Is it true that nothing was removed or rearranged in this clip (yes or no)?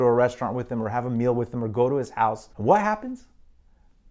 no